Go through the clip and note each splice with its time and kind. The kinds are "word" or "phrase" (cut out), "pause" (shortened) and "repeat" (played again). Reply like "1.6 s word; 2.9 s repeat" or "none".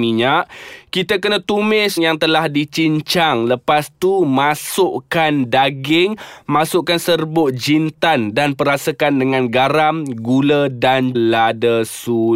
2.0 s word; 11.1 s word